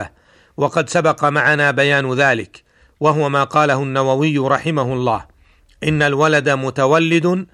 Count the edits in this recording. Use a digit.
0